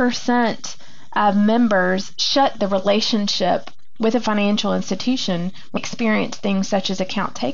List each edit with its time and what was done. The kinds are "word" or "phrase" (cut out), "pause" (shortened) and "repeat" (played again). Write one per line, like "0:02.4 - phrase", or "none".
0:02.6 - word
0:05.8 - word